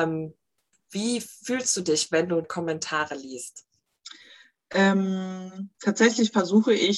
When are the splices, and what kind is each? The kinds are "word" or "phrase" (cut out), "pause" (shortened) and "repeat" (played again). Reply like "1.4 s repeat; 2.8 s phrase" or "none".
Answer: 2.4 s word; 5.7 s pause